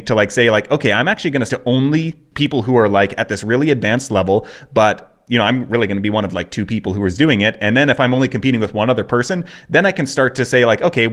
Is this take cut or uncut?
cut